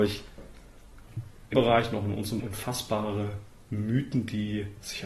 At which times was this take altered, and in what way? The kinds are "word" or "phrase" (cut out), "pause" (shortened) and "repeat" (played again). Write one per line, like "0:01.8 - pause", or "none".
0:01.5 - word
0:02.4 - word